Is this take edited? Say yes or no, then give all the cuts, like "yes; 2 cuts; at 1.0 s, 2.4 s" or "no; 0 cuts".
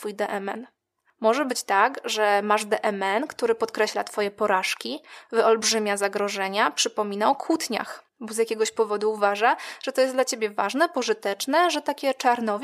yes; 1 cut; at 8.1 s